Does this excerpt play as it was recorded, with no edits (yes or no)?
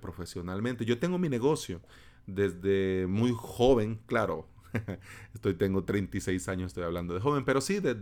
yes